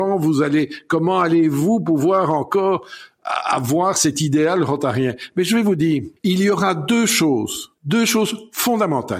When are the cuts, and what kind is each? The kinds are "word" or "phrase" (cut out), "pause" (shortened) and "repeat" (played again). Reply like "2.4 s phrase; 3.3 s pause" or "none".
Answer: 6.2 s pause

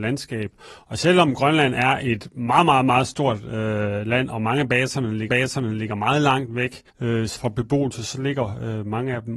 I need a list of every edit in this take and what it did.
5.3 s repeat; 6.9 s pause; 7.4 s phrase

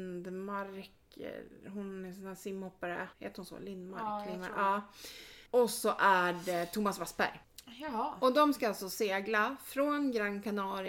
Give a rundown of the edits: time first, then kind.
3.1 s pause; 5.5 s pause

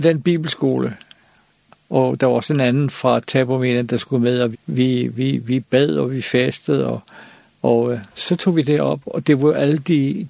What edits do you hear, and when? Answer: 4.5 s word

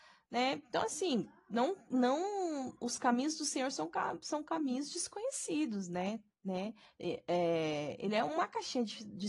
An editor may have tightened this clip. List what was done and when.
6.9 s pause

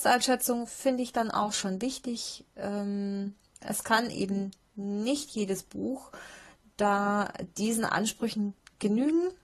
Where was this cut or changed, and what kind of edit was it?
none

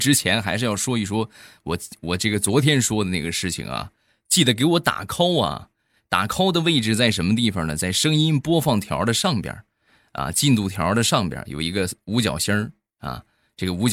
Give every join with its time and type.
none

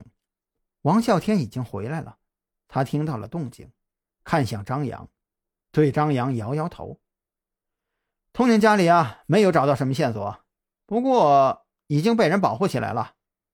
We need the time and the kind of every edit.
none

